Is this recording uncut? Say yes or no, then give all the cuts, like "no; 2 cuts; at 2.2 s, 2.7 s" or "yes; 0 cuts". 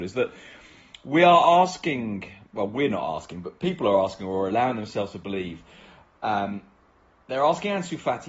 yes; 0 cuts